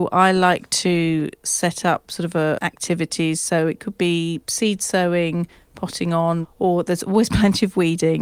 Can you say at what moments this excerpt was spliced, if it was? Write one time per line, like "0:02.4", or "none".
0:02.6